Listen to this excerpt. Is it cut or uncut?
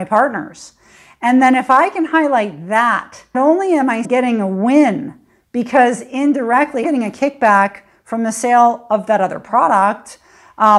cut